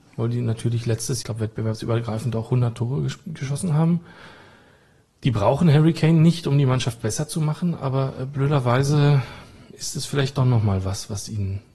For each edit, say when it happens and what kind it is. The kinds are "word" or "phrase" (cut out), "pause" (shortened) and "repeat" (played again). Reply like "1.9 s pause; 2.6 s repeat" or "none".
1.2 s phrase